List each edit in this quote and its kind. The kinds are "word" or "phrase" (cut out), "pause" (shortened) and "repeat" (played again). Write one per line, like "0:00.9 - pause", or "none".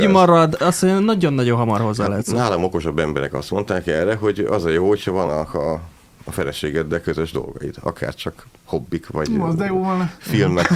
none